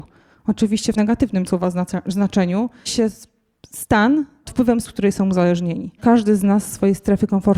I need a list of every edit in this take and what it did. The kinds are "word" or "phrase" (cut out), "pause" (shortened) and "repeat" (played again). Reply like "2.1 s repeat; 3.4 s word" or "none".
1.0 s word; 1.5 s word; 2.9 s word; 4.5 s word; 4.8 s word; 6.0 s word